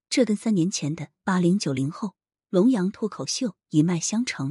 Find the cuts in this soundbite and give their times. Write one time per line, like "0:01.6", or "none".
none

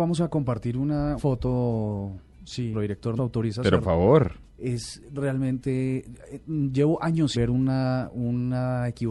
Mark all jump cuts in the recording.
0:01.2
0:02.7
0:03.2
0:03.8
0:07.3

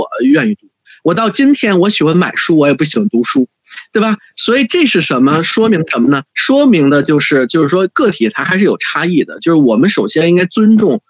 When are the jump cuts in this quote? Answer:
0:06.3

